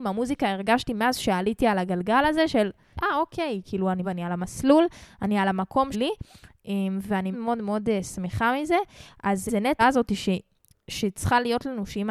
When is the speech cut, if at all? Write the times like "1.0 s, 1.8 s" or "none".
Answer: 2.9 s, 4.0 s, 5.9 s, 7.3 s, 9.5 s, 9.8 s